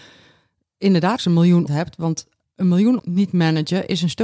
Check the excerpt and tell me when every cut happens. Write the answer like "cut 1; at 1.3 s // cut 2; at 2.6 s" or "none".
cut 1; at 1.2 s // cut 2; at 1.7 s // cut 3; at 3.0 s